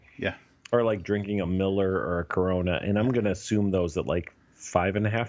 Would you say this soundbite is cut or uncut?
uncut